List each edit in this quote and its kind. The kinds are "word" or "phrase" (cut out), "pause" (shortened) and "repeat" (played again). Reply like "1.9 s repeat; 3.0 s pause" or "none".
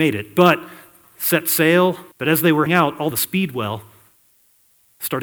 2.1 s pause; 2.7 s word; 3.1 s phrase

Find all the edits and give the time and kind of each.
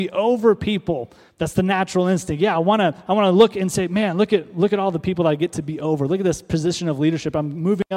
1.3 s pause

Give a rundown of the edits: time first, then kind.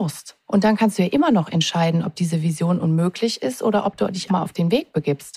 4.3 s word

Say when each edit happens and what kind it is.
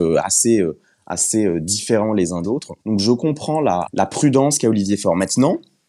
2.4 s word; 2.8 s pause; 3.9 s word

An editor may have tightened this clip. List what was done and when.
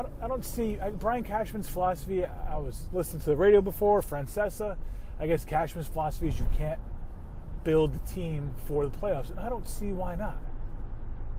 none

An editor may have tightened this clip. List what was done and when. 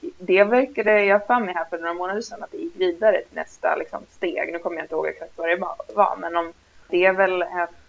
none

